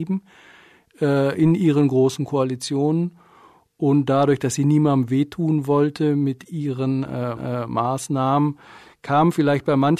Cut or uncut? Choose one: cut